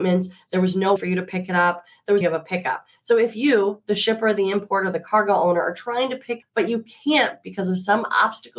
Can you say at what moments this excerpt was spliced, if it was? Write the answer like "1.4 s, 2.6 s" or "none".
1.0 s, 2.2 s, 6.4 s